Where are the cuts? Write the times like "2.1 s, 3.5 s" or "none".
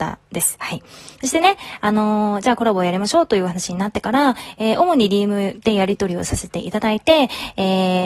none